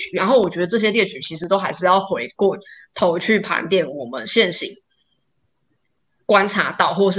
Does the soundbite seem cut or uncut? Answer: uncut